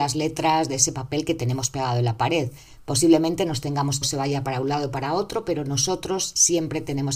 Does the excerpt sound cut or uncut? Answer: cut